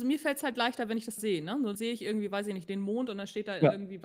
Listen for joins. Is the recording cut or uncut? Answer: cut